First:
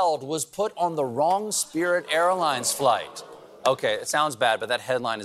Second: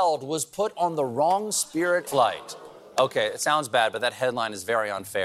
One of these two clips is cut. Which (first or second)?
second